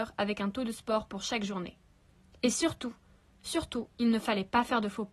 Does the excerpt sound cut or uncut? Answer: uncut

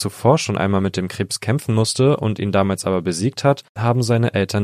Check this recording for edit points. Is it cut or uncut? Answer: cut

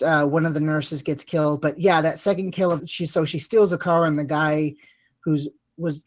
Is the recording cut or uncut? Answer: cut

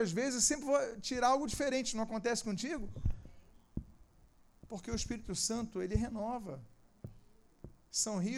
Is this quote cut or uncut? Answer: uncut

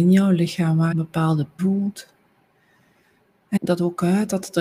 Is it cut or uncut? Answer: cut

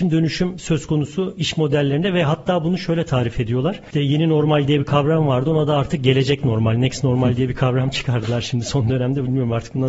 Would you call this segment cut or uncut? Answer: uncut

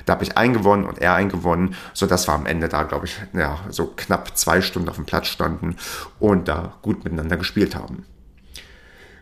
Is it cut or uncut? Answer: uncut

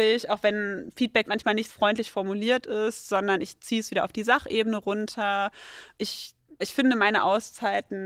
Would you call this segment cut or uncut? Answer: cut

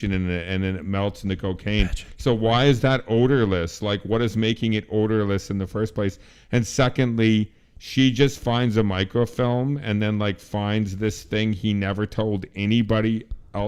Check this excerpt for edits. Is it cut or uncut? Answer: uncut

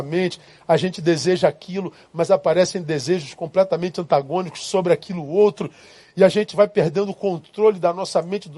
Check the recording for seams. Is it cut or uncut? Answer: uncut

